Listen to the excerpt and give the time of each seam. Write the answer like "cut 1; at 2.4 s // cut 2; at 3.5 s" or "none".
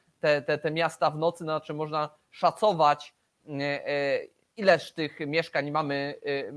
none